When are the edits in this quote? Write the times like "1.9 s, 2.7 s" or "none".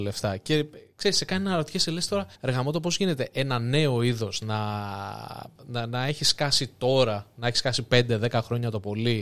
2.3 s, 5.5 s